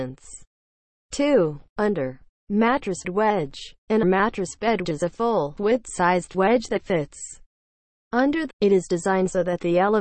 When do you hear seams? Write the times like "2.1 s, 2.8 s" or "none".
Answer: 3.0 s, 4.0 s, 4.8 s, 5.6 s, 8.5 s